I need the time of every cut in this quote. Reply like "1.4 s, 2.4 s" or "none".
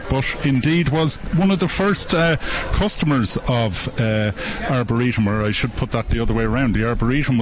none